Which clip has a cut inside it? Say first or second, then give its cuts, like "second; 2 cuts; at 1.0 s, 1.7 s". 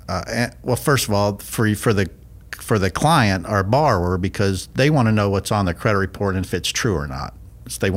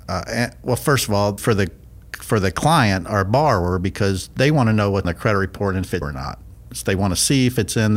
second; 3 cuts; at 1.4 s, 5.0 s, 6.0 s